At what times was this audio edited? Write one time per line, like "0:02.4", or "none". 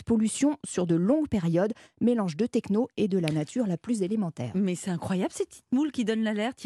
none